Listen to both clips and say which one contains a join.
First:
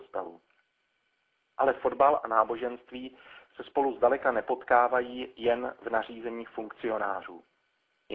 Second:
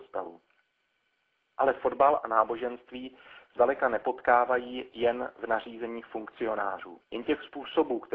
second; 2 cuts; at 3.6 s, 7.0 s

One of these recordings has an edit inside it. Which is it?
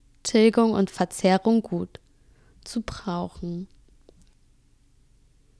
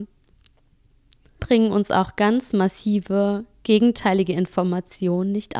second; 1 cut; at 1.4 s

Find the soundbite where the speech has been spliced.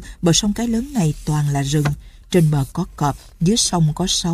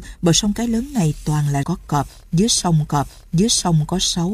second; 2 cuts; at 1.6 s, 2.9 s

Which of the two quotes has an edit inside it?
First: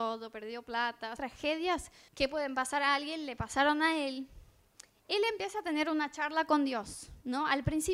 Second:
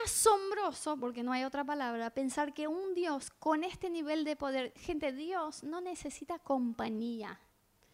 first; 2 cuts; at 1.2 s, 2.1 s

